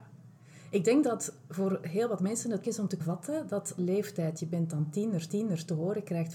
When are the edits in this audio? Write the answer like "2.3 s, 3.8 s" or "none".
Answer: 2.6 s, 3.0 s, 3.8 s, 5.3 s